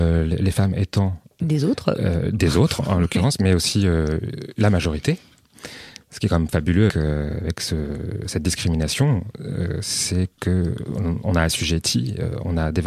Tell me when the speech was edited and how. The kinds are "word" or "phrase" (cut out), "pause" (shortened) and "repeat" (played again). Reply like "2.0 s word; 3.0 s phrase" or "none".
6.9 s word